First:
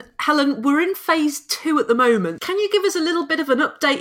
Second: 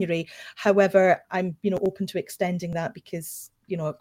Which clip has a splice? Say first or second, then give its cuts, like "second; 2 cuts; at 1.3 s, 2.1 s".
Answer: first; 1 cut; at 2.4 s